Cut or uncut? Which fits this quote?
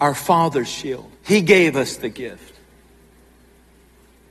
cut